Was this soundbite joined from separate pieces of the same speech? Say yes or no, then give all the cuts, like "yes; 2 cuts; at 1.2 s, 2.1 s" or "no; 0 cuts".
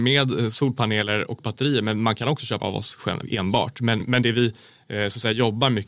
yes; 3 cuts; at 2.6 s, 3.2 s, 4.0 s